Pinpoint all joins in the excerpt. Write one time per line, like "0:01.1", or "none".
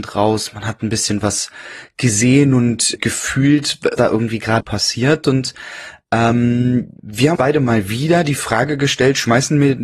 0:03.0
0:04.0
0:04.6
0:07.0
0:07.4